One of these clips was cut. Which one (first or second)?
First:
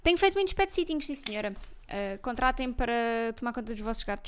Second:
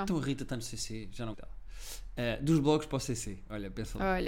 second